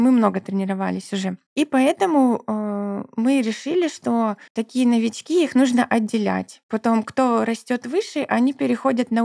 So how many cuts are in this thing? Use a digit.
0